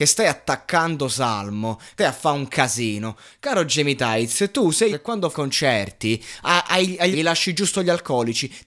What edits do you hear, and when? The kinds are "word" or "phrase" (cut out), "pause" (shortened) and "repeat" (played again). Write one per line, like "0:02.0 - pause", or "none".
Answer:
0:02.0 - word
0:04.9 - word
0:05.3 - word
0:07.1 - word